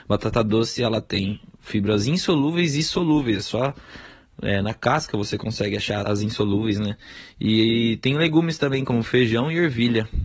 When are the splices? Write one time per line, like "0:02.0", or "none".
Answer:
0:06.0